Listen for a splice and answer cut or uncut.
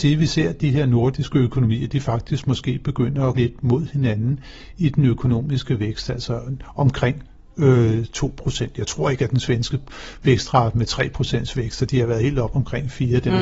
cut